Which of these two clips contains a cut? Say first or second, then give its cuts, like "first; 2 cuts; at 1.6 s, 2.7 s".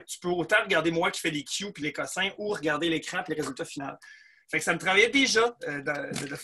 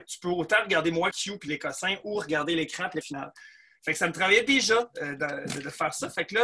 second; 2 cuts; at 1.1 s, 3.0 s